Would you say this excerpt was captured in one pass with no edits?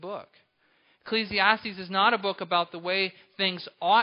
yes; 0 cuts

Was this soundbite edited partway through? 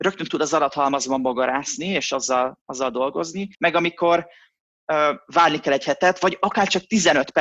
yes; 1 cut; at 3.5 s

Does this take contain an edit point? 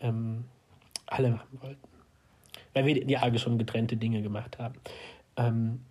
yes; 2 cuts; at 1.3 s, 3.1 s

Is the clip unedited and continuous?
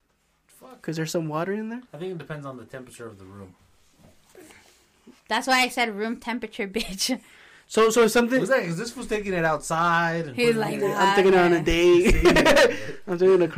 no; 2 cuts; at 1.9 s, 5.2 s

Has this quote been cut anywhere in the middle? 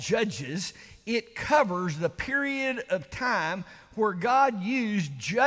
no; 0 cuts

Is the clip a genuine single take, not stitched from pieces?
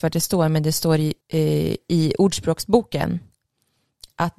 no; 1 cut; at 1.2 s

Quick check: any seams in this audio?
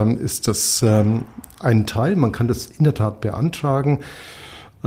no; 0 cuts

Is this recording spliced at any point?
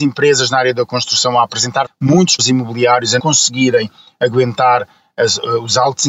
yes; 3 cuts; at 1.9 s, 2.4 s, 3.2 s

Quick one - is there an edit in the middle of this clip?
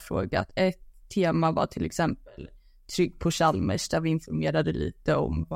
no; 0 cuts

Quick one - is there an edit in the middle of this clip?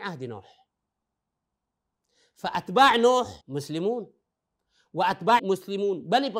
yes; 2 cuts; at 3.4 s, 5.4 s

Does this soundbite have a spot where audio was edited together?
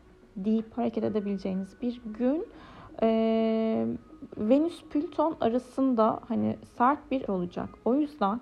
yes; 1 cut; at 7.3 s

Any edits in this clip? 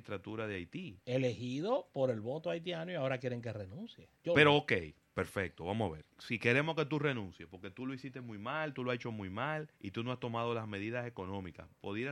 yes; 3 cuts; at 4.2 s, 6.1 s, 9.8 s

